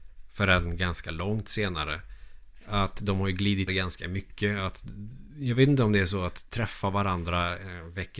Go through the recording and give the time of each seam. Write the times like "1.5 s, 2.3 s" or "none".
3.7 s